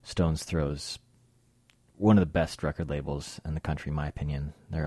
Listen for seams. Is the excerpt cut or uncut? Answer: uncut